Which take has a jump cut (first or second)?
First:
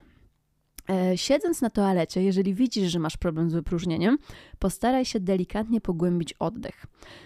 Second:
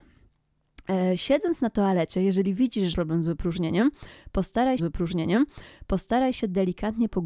second